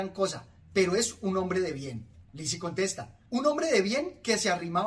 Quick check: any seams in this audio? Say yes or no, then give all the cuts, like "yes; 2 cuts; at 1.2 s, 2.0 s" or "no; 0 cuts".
yes; 2 cuts; at 2.2 s, 3.3 s